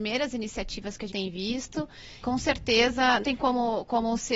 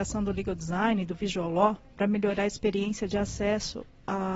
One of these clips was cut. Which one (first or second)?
first